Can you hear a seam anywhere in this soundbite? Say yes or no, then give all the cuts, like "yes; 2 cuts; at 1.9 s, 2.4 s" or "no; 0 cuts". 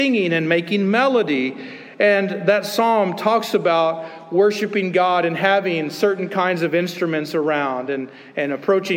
no; 0 cuts